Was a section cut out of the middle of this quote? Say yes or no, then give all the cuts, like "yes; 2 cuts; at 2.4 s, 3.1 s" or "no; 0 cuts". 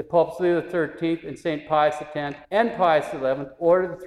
yes; 1 cut; at 2.4 s